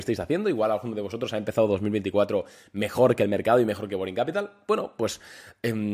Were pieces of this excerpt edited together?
no; 0 cuts

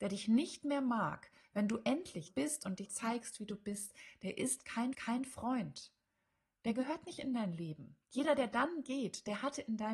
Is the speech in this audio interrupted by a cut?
yes; 4 cuts; at 2.3 s, 2.8 s, 4.9 s, 8.0 s

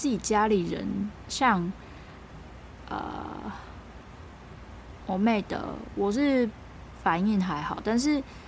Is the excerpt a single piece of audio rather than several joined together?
yes; 0 cuts

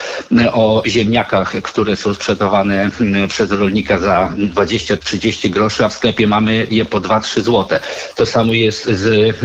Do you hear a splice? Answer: no; 0 cuts

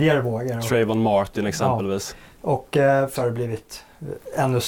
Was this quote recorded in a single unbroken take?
no; 1 cut; at 3.1 s

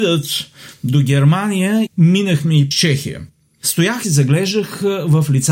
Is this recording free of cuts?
no; 3 cuts; at 1.9 s, 2.7 s, 4.0 s

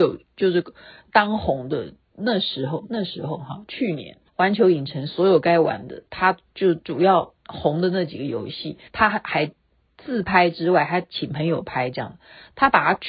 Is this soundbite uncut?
no; 3 cuts; at 4.3 s, 7.4 s, 8.9 s

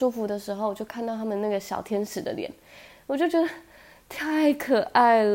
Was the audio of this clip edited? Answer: no; 0 cuts

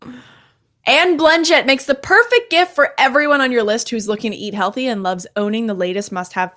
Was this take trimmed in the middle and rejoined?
no; 0 cuts

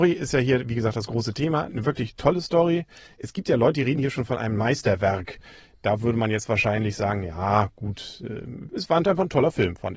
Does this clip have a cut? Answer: no; 0 cuts

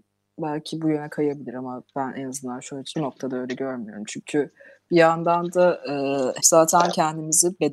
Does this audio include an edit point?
yes; 3 cuts; at 1.9 s, 2.9 s, 6.4 s

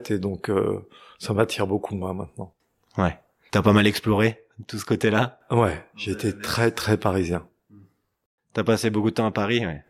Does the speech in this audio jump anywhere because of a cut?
no; 0 cuts

